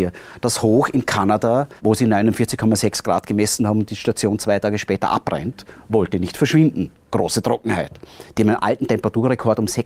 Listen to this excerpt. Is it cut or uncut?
cut